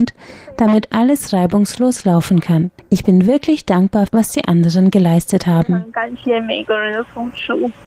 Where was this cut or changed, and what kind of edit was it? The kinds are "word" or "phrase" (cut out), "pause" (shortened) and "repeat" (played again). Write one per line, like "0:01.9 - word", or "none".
0:02.8 - pause
0:04.1 - phrase